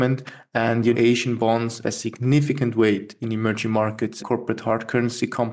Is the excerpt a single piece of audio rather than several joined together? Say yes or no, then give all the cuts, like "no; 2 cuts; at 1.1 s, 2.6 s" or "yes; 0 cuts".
no; 3 cuts; at 0.9 s, 1.8 s, 4.2 s